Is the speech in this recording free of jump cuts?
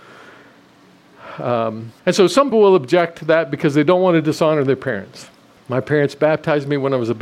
no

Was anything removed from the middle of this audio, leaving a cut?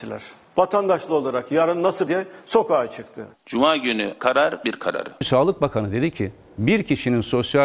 yes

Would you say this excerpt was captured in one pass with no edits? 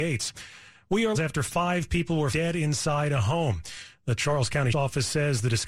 no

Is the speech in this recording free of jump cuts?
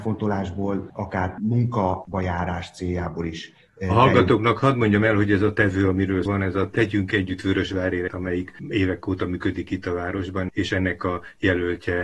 no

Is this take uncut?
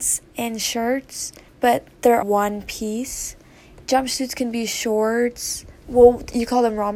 no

